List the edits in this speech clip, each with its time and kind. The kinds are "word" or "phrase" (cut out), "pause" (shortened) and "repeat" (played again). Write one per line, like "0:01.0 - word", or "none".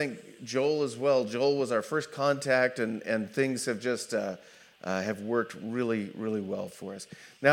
none